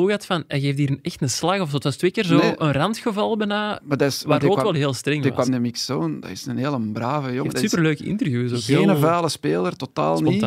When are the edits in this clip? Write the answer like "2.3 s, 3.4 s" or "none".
5.5 s